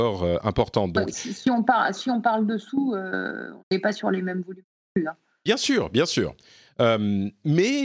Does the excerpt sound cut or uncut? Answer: uncut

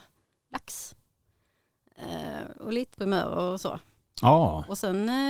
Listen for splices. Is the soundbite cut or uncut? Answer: cut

